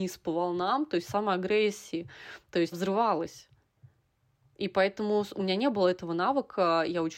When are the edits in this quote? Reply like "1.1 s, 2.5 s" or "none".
2.7 s